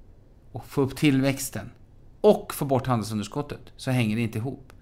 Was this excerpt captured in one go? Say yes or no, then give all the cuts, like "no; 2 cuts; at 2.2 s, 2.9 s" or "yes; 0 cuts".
yes; 0 cuts